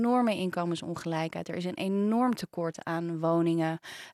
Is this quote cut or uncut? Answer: uncut